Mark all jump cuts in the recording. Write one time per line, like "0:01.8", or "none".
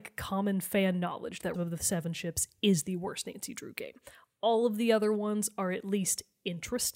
0:01.5